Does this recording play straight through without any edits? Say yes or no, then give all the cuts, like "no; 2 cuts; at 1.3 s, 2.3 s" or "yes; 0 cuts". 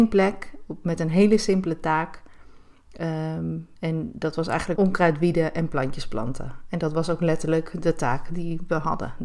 no; 2 cuts; at 3.8 s, 4.8 s